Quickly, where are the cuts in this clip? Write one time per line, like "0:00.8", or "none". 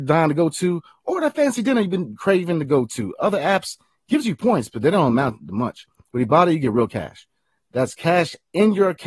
none